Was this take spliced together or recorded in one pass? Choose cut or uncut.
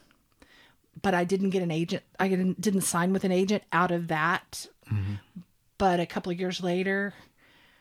uncut